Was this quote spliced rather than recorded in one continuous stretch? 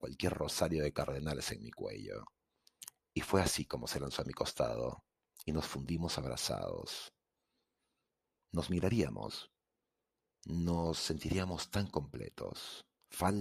no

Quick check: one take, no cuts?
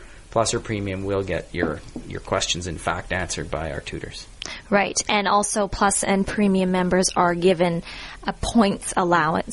yes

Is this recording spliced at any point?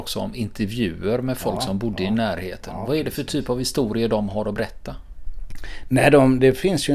no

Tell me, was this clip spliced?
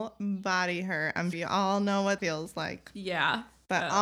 yes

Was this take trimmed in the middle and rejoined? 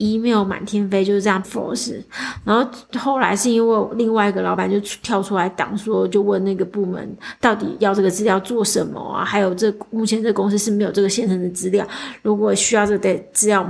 yes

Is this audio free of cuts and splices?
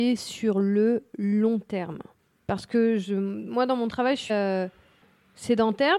no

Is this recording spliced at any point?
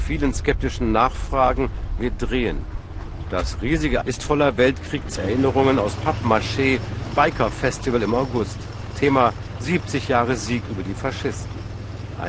yes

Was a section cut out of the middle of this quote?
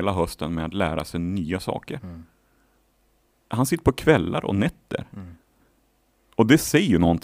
no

